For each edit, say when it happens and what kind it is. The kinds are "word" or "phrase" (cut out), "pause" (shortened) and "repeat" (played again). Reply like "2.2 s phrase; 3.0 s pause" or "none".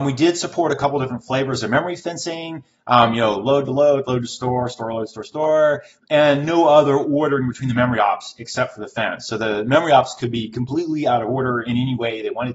none